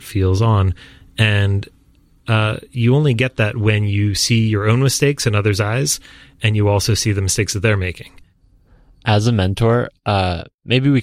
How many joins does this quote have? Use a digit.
0